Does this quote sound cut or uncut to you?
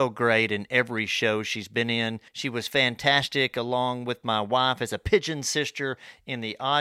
cut